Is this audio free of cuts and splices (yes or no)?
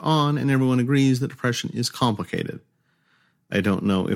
yes